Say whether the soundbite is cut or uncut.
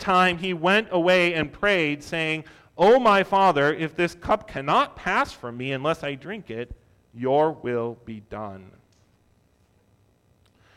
uncut